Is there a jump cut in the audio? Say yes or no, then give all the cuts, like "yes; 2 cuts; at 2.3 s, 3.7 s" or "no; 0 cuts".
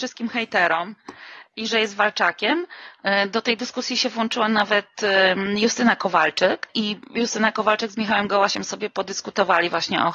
no; 0 cuts